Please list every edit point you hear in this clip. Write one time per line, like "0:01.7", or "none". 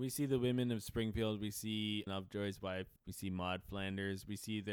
0:02.1
0:03.0